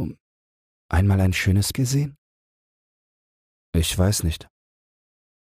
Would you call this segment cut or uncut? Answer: cut